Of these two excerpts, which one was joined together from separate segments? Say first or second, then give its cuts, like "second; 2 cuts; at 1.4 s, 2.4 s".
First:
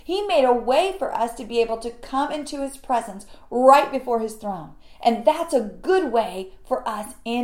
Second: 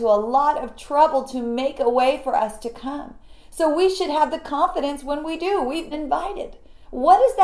second; 1 cut; at 5.9 s